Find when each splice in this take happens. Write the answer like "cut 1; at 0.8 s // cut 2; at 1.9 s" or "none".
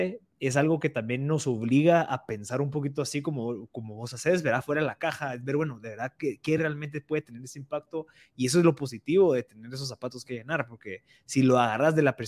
none

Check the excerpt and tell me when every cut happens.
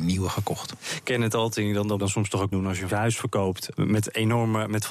cut 1; at 2.0 s // cut 2; at 2.5 s // cut 3; at 2.9 s // cut 4; at 3.7 s

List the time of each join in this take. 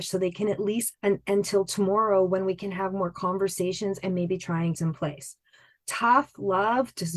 cut 1; at 0.9 s // cut 2; at 4.7 s

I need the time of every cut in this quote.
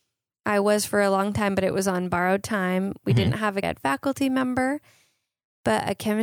cut 1; at 3.6 s

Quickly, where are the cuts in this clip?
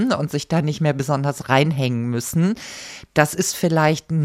none

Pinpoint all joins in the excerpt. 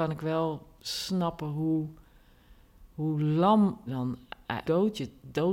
cut 1; at 3.9 s // cut 2; at 4.6 s

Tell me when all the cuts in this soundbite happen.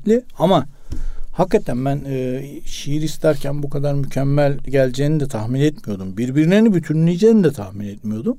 cut 1; at 4.7 s

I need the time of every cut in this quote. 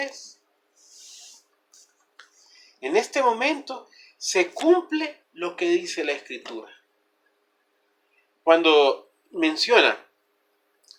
cut 1; at 9.2 s

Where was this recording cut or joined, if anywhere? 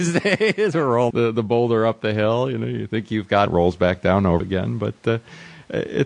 cut 1; at 1.1 s // cut 2; at 3.5 s // cut 3; at 4.4 s

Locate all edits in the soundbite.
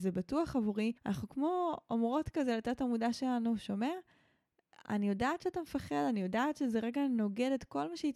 cut 1; at 1.0 s

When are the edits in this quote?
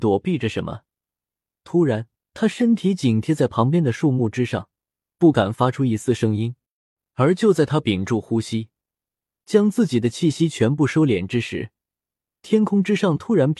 cut 1; at 2.2 s

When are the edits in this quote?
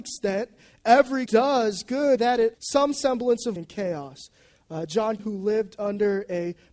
cut 1; at 1.3 s // cut 2; at 2.2 s // cut 3; at 2.5 s // cut 4; at 3.6 s // cut 5; at 5.2 s

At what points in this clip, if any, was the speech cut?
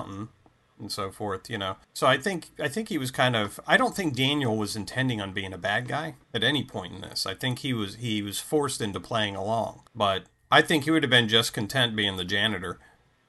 cut 1; at 1.8 s // cut 2; at 6.2 s // cut 3; at 9.9 s

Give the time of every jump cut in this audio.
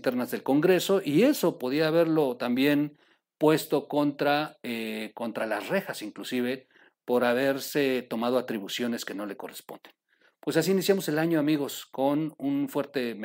none

